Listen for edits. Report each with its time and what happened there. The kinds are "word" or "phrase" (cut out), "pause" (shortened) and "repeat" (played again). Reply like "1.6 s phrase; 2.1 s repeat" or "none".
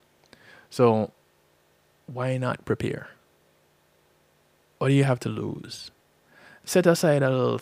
none